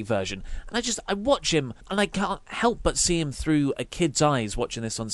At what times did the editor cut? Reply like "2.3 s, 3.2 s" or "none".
1.8 s